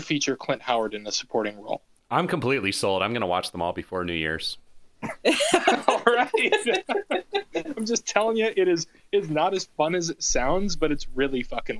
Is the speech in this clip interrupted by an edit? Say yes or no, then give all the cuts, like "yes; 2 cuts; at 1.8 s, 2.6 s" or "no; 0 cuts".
no; 0 cuts